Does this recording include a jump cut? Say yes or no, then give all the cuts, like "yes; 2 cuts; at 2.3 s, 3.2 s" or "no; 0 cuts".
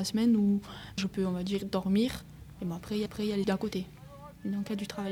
yes; 3 cuts; at 1.0 s, 3.1 s, 3.4 s